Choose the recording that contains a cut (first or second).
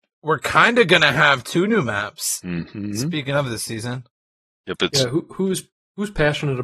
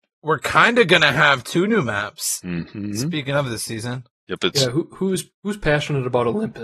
second